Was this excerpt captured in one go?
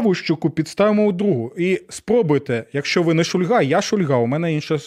yes; 0 cuts

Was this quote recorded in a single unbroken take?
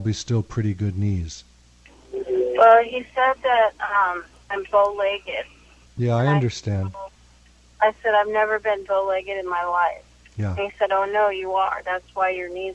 yes; 0 cuts

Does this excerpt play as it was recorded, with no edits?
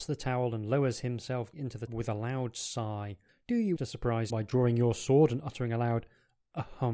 no; 4 cuts; at 1.5 s, 1.9 s, 3.8 s, 4.3 s

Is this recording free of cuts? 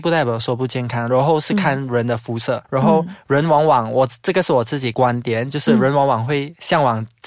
no; 1 cut; at 2.6 s

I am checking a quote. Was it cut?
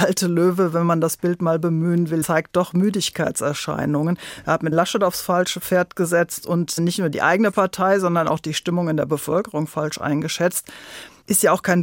yes; 2 cuts; at 2.2 s, 4.7 s

